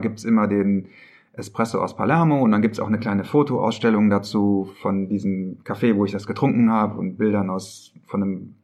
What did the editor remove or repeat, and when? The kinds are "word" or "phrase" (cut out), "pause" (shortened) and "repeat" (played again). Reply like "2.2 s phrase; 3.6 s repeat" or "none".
none

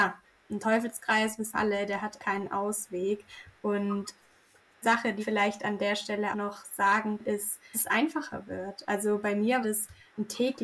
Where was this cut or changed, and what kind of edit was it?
1.5 s word; 2.2 s word; 4.8 s word; 5.2 s word; 6.3 s word; 7.2 s word; 7.7 s word; 9.6 s word

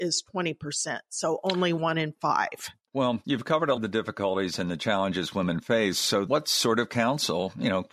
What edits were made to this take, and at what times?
3.8 s word; 6.3 s word

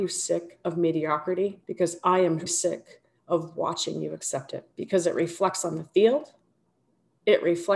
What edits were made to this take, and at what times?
1.6 s pause; 2.5 s word; 4.7 s pause

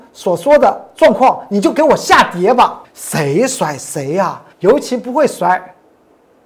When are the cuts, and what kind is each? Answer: 2.8 s pause; 4.5 s pause

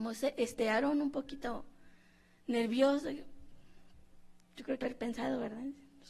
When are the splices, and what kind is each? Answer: 4.8 s word

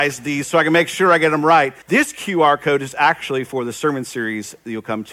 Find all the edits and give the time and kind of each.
1.8 s pause

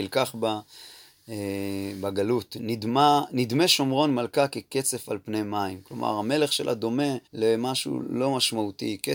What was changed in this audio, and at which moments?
7.2 s pause

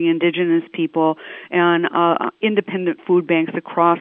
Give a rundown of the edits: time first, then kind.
none

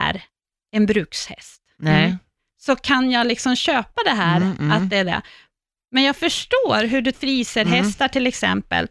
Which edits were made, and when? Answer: 7.1 s phrase

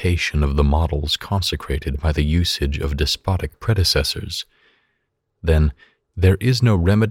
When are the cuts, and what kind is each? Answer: none

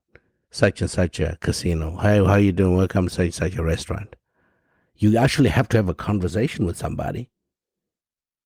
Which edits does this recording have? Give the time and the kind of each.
none

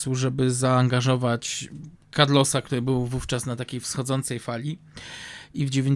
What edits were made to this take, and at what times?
none

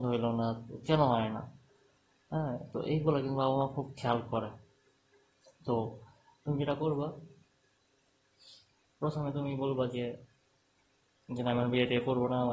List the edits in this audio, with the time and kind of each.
none

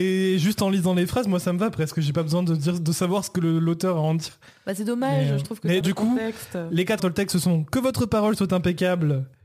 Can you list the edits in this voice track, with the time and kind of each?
5.8 s word; 7.0 s word

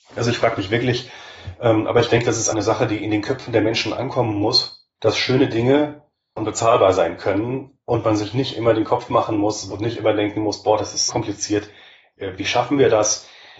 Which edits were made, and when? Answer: 2.5 s word; 5.0 s pause; 6.4 s word; 11.1 s word

